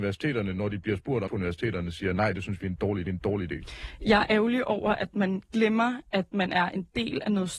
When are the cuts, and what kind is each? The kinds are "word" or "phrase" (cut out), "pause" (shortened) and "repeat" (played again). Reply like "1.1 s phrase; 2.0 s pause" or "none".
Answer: 1.3 s phrase; 3.1 s repeat; 4.3 s word